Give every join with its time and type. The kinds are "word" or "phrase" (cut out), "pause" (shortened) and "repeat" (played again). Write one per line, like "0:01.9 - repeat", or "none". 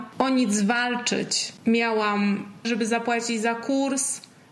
0:02.6 - word